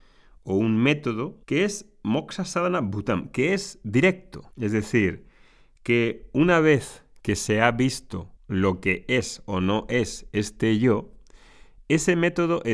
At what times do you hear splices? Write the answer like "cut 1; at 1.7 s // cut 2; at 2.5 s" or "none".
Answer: cut 1; at 1.4 s // cut 2; at 4.5 s // cut 3; at 8.4 s